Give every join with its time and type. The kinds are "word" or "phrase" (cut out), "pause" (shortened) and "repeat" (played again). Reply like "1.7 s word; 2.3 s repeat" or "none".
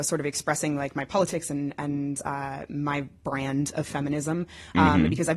none